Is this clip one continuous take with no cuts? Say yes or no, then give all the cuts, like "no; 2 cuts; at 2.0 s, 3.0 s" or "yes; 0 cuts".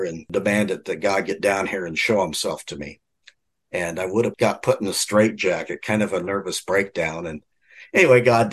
yes; 0 cuts